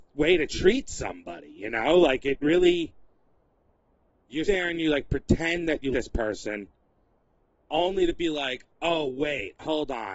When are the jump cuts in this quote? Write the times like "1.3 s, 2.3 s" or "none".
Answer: 4.5 s, 5.9 s